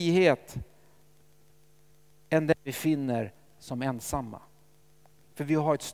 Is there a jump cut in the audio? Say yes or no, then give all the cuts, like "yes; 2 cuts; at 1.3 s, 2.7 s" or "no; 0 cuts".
no; 0 cuts